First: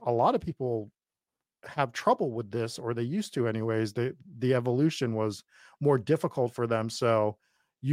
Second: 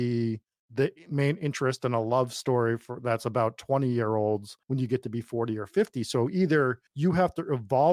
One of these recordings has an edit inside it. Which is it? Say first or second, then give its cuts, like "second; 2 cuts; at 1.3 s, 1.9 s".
second; 2 cuts; at 4.6 s, 6.9 s